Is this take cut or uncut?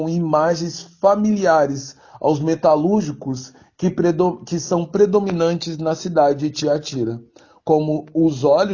uncut